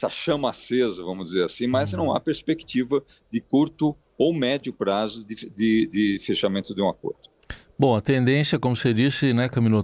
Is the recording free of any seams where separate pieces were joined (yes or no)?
yes